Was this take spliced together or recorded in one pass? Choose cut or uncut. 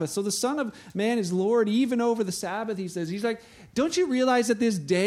uncut